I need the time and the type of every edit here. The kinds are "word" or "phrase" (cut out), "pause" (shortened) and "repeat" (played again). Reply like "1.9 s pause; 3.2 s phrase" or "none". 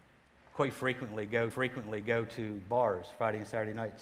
1.5 s repeat